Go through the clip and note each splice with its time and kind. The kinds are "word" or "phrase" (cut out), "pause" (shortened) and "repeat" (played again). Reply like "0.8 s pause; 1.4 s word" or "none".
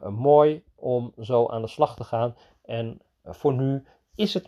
none